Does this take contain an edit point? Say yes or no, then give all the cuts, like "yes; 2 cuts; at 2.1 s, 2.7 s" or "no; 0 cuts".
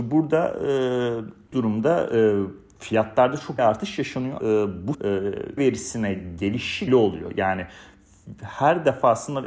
yes; 6 cuts; at 1.5 s, 3.6 s, 4.4 s, 4.9 s, 5.6 s, 6.9 s